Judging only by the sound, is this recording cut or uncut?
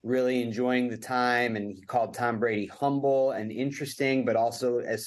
uncut